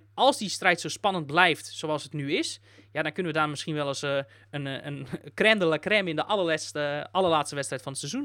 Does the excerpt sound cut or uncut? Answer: uncut